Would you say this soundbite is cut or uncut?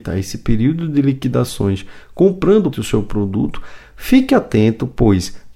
cut